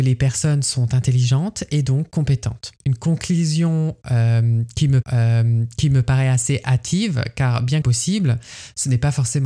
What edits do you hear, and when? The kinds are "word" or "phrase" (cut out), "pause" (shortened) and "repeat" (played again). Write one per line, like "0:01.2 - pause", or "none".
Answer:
0:02.8 - pause
0:05.0 - repeat
0:07.8 - phrase